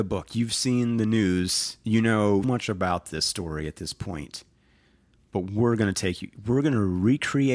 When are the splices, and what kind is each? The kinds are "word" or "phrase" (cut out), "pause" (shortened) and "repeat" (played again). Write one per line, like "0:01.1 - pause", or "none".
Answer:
0:02.4 - word